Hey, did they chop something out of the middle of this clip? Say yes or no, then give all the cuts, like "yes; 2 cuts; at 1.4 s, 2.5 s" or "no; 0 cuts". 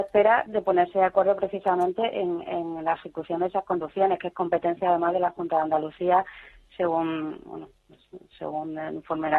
no; 0 cuts